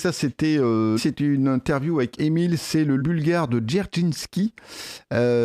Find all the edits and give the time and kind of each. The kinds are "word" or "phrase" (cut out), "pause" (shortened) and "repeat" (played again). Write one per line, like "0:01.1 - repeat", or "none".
0:01.0 - word
0:02.2 - word
0:03.0 - word